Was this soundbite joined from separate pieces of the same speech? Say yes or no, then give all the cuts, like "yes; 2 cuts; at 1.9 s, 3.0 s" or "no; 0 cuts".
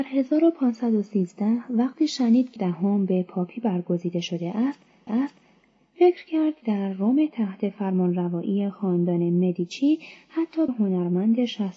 yes; 4 cuts; at 2.6 s, 5.1 s, 6.6 s, 10.7 s